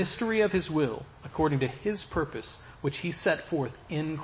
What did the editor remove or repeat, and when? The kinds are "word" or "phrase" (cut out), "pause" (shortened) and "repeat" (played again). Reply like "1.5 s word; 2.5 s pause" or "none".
none